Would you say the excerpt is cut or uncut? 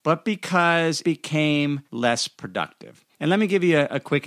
cut